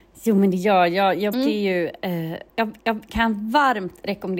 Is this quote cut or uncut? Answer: cut